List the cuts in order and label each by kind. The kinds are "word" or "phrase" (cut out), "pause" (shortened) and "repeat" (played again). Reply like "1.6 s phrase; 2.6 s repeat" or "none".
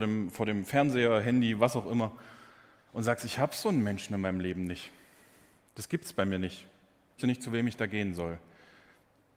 7.2 s word